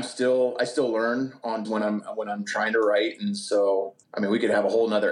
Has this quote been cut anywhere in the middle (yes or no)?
yes